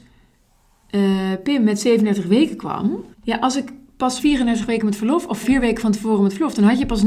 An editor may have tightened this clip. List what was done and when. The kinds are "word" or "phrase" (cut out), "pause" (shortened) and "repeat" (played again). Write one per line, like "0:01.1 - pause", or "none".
0:03.1 - pause
0:04.2 - word
0:05.4 - word